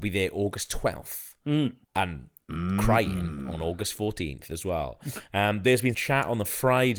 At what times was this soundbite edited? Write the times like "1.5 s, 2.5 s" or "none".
1.8 s, 5.9 s